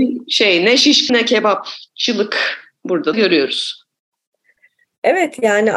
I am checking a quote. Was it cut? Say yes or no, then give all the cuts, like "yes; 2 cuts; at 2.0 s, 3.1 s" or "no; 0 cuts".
yes; 2 cuts; at 1.1 s, 3.1 s